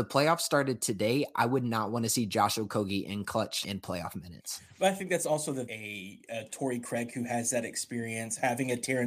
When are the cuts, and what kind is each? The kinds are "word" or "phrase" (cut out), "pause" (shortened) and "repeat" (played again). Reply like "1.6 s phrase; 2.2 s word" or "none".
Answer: 3.6 s word; 5.7 s phrase